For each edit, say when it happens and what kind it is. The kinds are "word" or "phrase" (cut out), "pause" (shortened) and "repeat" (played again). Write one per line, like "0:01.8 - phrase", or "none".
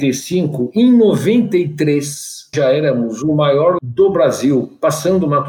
0:02.5 - word
0:03.8 - word